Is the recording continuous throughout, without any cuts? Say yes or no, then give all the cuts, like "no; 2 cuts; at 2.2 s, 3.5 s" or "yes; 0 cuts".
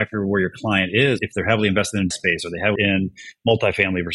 no; 3 cuts; at 1.2 s, 2.1 s, 2.8 s